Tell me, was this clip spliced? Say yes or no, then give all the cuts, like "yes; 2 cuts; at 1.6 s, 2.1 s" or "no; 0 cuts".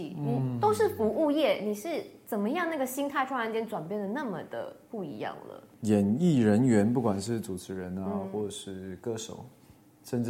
no; 0 cuts